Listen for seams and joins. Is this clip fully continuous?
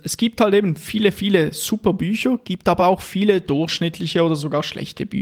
yes; 0 cuts

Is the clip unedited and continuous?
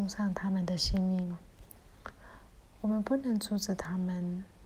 yes; 0 cuts

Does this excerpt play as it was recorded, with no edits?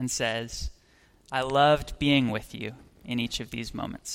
yes; 0 cuts

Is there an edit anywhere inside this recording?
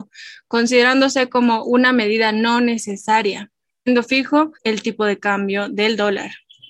yes; 2 cuts; at 3.7 s, 4.5 s

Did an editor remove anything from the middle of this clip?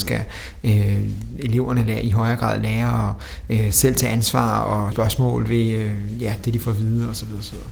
yes; 1 cut; at 4.9 s

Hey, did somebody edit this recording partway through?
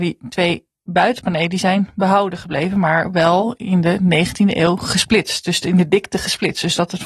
no; 0 cuts

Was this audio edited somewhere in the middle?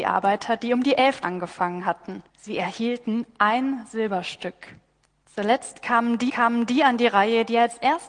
yes; 4 cuts; at 1.2 s, 2.3 s, 5.0 s, 6.3 s

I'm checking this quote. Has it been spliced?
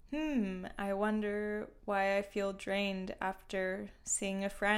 no; 0 cuts

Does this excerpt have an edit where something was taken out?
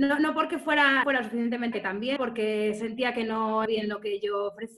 yes; 4 cuts; at 1.0 s, 1.7 s, 2.2 s, 3.7 s

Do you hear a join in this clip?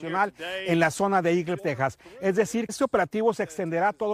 yes; 2 cuts; at 1.6 s, 2.7 s

